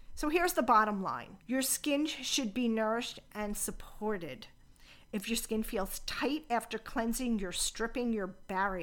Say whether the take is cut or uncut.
cut